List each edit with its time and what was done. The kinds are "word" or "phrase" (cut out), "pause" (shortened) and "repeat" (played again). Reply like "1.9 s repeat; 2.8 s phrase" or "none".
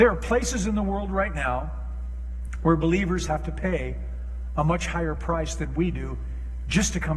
none